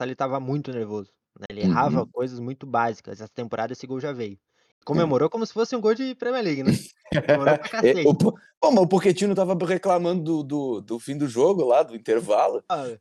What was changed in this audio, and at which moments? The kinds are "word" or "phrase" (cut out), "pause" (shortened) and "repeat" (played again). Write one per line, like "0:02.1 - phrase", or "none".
none